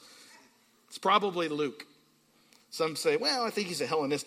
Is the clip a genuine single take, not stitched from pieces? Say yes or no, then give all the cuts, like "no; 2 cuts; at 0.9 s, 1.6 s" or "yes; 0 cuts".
yes; 0 cuts